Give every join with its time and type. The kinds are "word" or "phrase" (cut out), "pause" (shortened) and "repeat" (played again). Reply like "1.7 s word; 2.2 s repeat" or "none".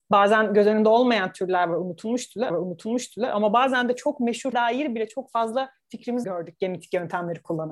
2.5 s repeat; 4.5 s word; 6.2 s word

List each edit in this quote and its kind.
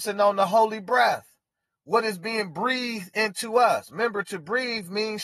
none

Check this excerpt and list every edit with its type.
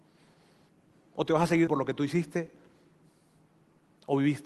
1.7 s word

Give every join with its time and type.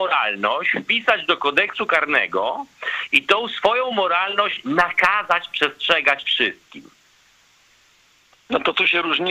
none

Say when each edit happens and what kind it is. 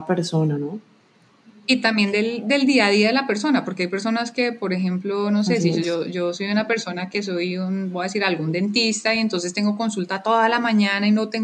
none

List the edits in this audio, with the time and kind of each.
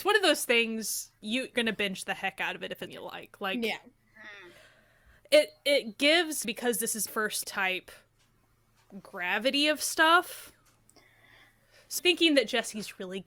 1.5 s word; 2.9 s word; 6.4 s word; 7.1 s word; 7.4 s word; 12.0 s word

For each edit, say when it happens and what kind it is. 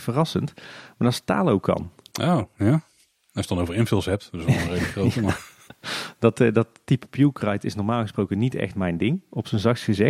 none

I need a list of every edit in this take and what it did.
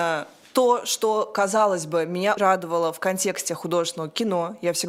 2.4 s word

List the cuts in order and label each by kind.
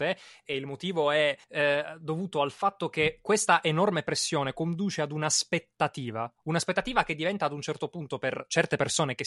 1.4 s pause

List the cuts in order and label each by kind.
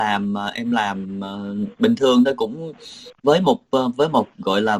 none

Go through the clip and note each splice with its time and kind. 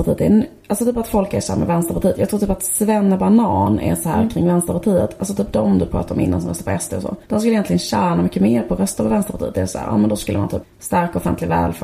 7.2 s pause; 10.6 s phrase

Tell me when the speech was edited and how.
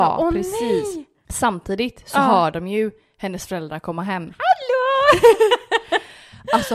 none

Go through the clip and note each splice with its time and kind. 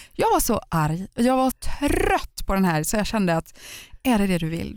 1.5 s word

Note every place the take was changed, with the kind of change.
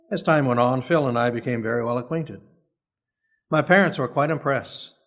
none

